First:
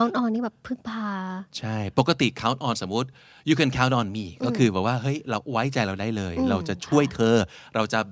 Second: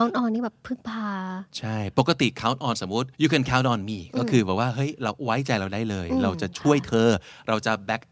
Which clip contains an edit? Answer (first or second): second